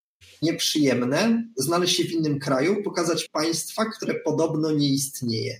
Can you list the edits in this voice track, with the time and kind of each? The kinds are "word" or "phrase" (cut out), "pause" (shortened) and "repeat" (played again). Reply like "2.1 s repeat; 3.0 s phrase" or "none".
3.3 s word